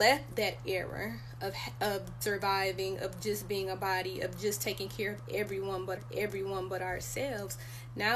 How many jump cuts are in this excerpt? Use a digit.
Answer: 2